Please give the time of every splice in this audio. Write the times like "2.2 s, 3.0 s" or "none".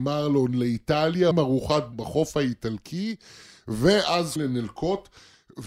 1.3 s, 1.9 s, 4.4 s